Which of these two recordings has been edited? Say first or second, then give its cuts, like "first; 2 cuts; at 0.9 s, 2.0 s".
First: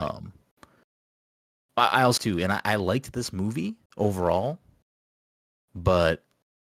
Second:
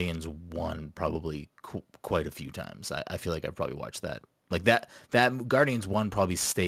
first; 2 cuts; at 2.2 s, 3.9 s